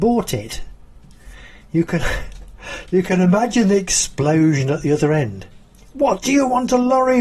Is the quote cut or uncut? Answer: uncut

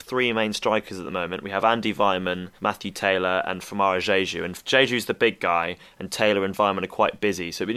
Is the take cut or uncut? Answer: cut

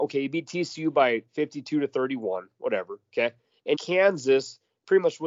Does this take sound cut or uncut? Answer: cut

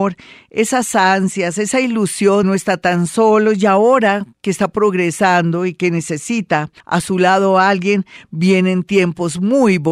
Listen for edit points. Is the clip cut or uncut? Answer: cut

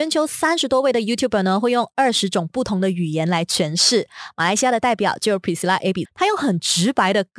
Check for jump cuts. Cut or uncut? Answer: cut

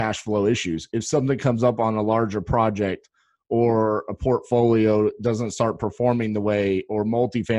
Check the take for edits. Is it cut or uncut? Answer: uncut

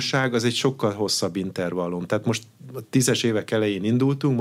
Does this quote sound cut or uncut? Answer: uncut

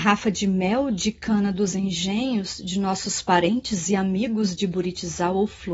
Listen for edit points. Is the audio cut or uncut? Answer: uncut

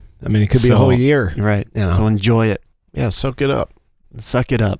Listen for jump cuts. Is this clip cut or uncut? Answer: uncut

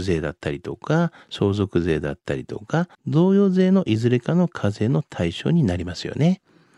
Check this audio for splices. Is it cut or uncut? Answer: cut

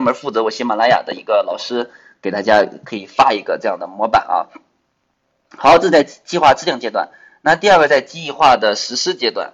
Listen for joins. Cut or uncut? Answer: uncut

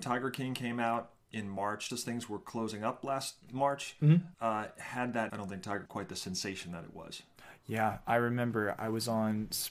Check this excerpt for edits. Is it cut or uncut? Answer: cut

